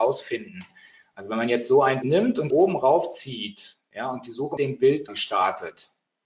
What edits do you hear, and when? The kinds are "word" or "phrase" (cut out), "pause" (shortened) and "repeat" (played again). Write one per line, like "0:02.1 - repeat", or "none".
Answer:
0:02.0 - word
0:02.5 - word
0:04.6 - word
0:05.1 - word

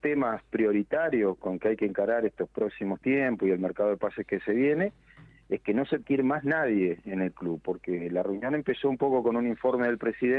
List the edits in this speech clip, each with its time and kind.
0:06.0 - word

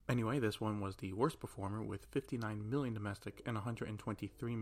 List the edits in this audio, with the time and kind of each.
none

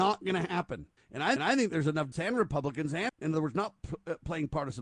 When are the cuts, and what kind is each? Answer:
0:01.0 - pause
0:01.4 - repeat
0:02.1 - word
0:03.1 - phrase

